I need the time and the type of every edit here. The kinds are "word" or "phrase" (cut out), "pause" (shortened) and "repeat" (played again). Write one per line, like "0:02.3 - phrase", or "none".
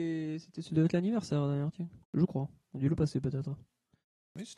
0:02.0 - pause